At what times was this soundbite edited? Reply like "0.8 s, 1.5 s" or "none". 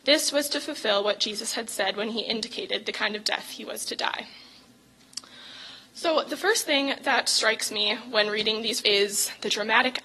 8.8 s